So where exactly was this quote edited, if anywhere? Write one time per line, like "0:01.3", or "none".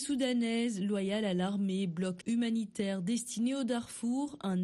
0:02.2